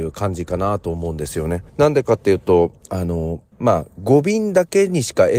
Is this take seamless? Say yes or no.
no